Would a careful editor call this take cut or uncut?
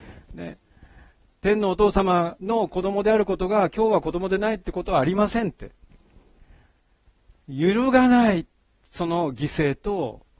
uncut